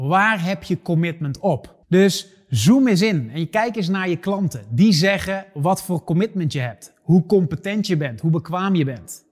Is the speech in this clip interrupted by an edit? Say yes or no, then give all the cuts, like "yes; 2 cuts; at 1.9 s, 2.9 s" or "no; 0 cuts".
yes; 1 cut; at 1.8 s